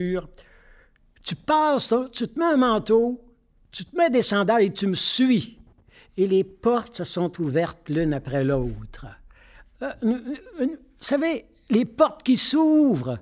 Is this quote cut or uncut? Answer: uncut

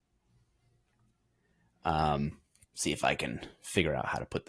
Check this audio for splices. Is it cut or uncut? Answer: uncut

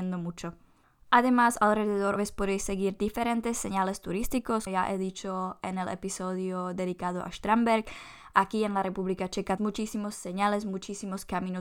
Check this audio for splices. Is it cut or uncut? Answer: cut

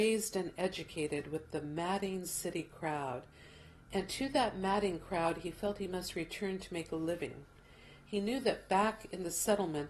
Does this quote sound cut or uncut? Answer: uncut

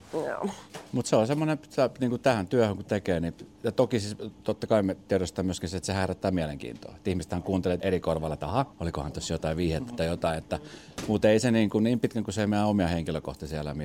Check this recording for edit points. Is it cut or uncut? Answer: cut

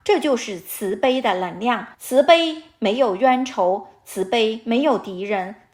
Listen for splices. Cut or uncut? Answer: cut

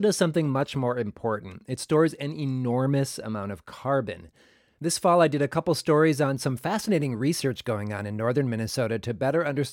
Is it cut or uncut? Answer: uncut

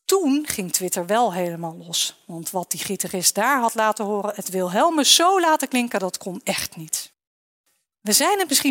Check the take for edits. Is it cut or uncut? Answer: uncut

